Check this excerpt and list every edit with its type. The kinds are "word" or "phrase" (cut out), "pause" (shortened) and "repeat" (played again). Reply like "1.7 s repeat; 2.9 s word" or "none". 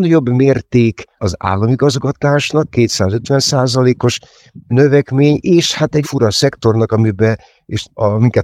1.2 s word; 6.0 s word

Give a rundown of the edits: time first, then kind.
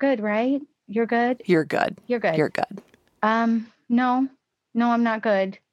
none

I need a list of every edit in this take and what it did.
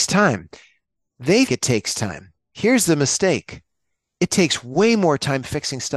1.5 s word

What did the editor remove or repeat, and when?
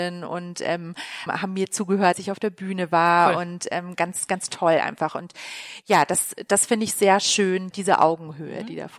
1.3 s word; 2.1 s word; 7.7 s word

